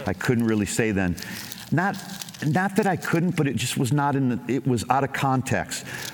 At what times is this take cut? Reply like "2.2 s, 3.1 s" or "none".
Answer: none